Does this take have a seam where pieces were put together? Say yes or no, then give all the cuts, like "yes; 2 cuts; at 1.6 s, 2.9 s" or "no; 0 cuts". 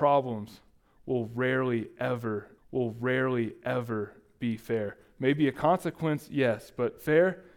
yes; 1 cut; at 2.6 s